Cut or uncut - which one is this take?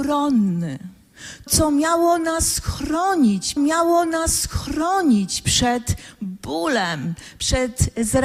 cut